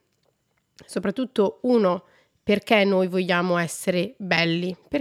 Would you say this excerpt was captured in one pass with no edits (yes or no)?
yes